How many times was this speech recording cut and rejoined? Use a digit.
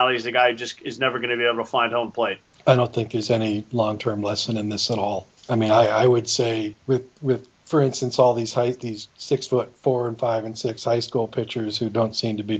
5